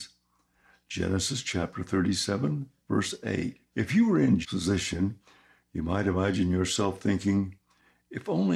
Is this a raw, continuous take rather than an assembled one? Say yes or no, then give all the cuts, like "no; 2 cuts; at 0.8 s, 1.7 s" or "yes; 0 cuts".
no; 2 cuts; at 3.7 s, 4.4 s